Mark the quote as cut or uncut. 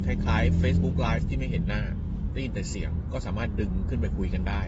uncut